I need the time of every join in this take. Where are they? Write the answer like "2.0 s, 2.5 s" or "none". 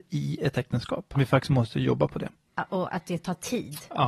1.1 s